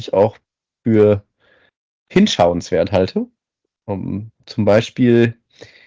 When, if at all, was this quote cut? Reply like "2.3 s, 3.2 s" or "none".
none